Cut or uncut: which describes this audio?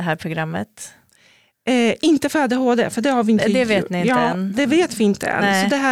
uncut